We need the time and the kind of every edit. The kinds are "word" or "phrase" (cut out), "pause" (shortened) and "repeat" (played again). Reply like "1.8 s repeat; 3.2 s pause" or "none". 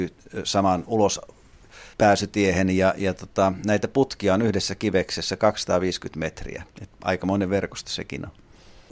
1.9 s pause; 6.7 s pause